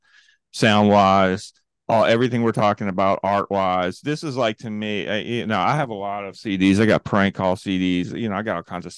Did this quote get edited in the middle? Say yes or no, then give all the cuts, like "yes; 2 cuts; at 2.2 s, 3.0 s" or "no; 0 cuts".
no; 0 cuts